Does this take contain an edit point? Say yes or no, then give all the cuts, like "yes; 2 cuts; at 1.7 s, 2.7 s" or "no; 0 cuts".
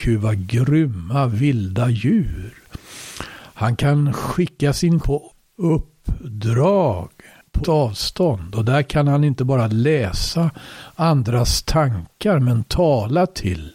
yes; 2 cuts; at 5.0 s, 7.6 s